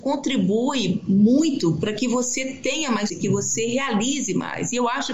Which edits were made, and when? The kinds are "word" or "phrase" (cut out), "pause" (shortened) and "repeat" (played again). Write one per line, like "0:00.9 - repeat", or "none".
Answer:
0:03.1 - word

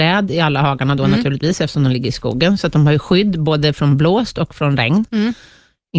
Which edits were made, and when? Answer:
none

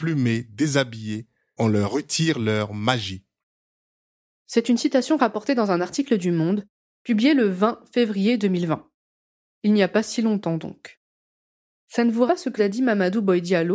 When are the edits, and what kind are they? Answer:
0:01.6 - word
0:12.3 - word
0:12.6 - word

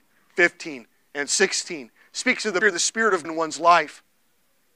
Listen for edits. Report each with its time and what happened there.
0:02.6 - word
0:03.2 - word

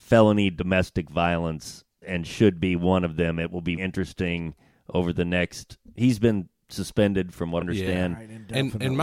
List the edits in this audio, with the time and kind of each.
0:02.0 - word
0:03.8 - word
0:07.6 - word

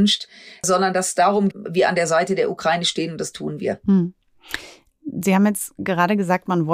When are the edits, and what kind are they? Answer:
0:01.5 - phrase

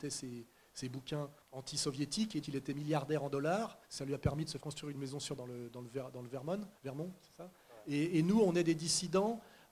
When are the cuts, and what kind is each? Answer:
0:01.4 - pause
0:02.4 - word
0:03.8 - pause
0:04.6 - word
0:05.4 - word
0:06.8 - pause

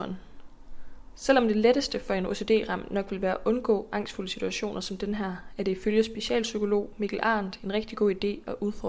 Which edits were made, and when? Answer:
none

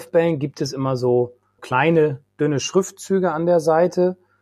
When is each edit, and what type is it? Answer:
0:01.6 - word

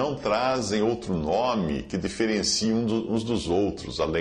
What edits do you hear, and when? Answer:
none

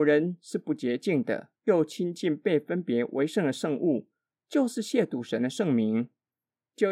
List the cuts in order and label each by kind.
0:01.6 - pause

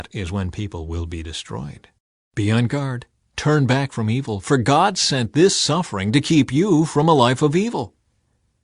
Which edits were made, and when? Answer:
none

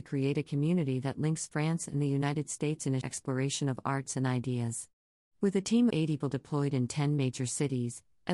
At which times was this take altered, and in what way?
0:03.0 - word
0:05.9 - word
0:06.2 - word

